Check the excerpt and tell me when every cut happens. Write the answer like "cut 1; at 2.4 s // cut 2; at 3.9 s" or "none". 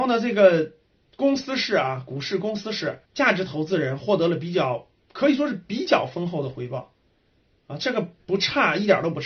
cut 1; at 3.0 s // cut 2; at 8.2 s